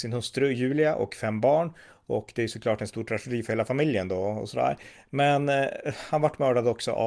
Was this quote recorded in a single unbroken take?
yes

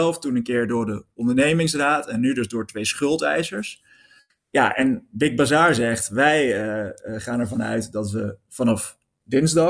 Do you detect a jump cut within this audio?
no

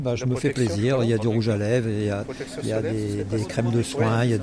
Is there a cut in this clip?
no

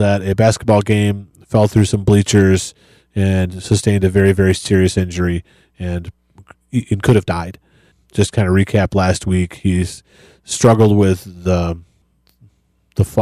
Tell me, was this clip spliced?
no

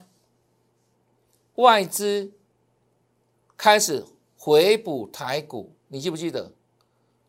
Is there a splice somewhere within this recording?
no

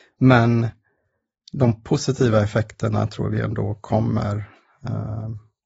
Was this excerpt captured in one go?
yes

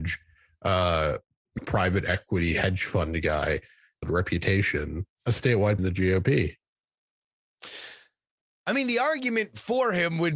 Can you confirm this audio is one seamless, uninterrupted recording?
no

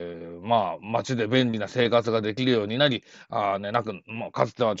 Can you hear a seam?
no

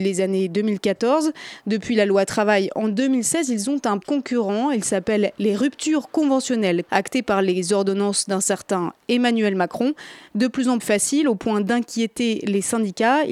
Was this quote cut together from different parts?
yes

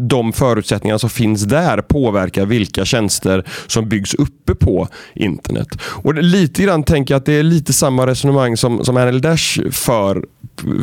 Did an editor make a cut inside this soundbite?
no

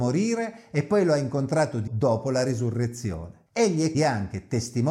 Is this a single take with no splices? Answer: no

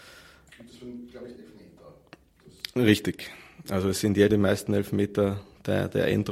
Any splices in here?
yes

